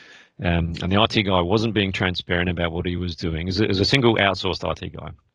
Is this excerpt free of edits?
yes; 0 cuts

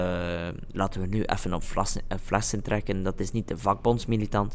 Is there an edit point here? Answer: no; 0 cuts

